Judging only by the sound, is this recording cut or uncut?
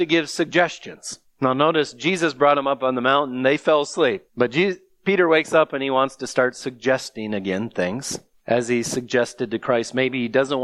cut